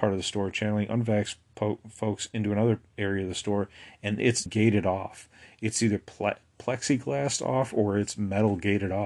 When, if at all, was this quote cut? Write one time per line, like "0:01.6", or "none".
0:04.5